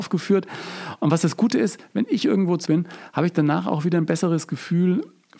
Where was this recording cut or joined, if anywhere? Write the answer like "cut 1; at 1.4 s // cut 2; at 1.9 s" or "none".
cut 1; at 2.6 s